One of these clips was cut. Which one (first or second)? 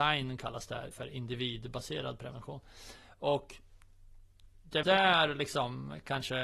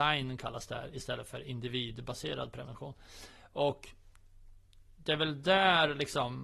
first